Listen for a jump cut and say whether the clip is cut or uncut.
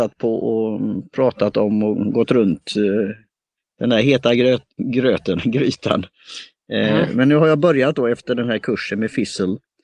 uncut